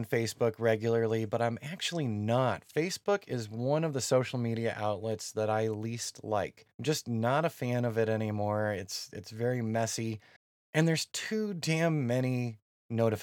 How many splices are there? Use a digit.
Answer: 2